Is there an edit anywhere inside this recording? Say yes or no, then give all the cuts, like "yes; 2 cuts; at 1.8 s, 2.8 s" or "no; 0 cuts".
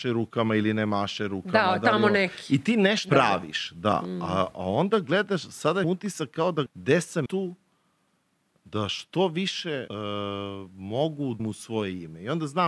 yes; 6 cuts; at 3.1 s, 5.8 s, 6.7 s, 7.3 s, 9.9 s, 11.4 s